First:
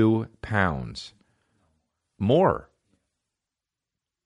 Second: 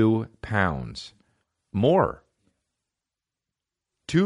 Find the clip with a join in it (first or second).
second